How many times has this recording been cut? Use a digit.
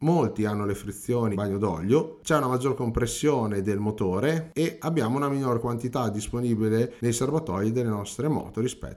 1